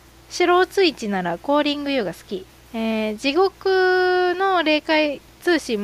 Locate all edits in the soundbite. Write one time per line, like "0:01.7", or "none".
none